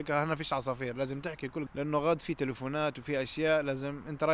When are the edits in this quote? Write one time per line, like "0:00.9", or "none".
0:01.7